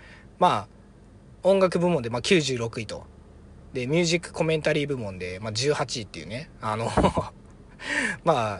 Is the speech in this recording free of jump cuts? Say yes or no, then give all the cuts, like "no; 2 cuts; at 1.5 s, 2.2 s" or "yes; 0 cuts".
yes; 0 cuts